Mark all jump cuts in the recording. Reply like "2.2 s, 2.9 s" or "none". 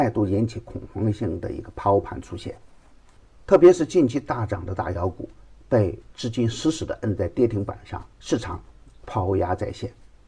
8.1 s

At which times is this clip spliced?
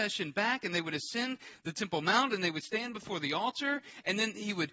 none

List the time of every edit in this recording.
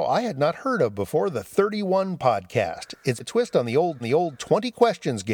3.2 s, 4.0 s

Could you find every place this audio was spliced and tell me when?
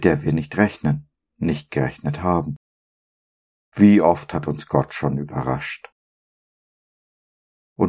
none

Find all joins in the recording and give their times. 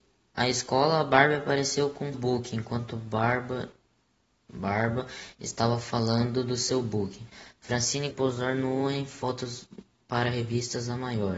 2.1 s, 8.1 s

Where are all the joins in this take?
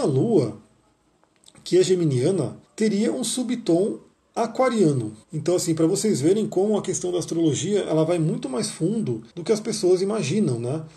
2.6 s, 5.2 s, 9.3 s

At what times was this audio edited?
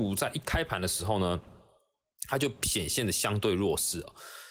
none

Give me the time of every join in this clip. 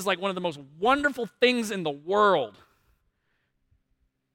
none

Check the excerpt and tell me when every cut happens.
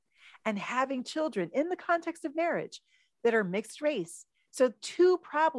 none

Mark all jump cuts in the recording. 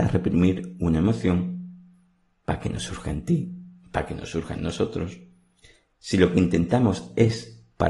none

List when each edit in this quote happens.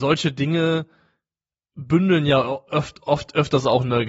none

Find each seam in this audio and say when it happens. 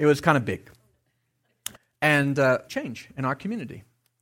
1.8 s, 2.7 s

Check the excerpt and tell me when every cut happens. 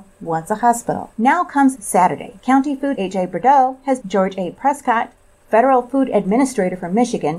1.1 s, 1.7 s, 2.4 s, 2.9 s, 4.0 s

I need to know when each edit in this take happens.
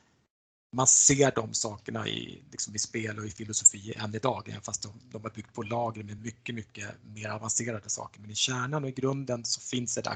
none

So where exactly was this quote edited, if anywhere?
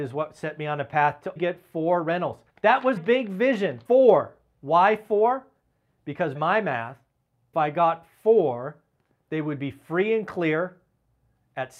1.4 s, 2.5 s, 3.0 s, 3.9 s, 6.3 s, 7.5 s

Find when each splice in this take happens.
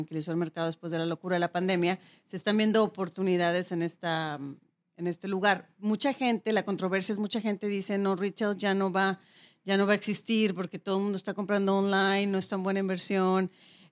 none

